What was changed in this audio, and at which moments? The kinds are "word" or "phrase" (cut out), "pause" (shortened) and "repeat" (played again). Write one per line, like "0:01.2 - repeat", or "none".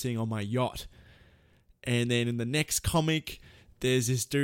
none